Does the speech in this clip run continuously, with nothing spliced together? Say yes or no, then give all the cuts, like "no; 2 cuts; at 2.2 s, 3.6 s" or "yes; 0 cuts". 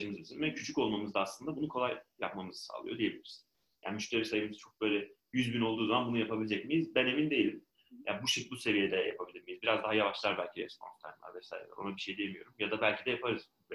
yes; 0 cuts